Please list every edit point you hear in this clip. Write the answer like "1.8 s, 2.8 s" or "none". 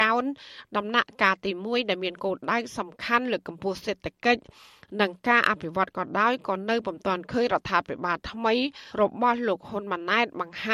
8.9 s